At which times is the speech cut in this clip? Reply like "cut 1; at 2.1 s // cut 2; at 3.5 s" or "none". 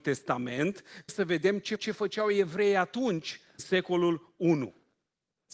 cut 1; at 1.1 s // cut 2; at 1.8 s // cut 3; at 3.6 s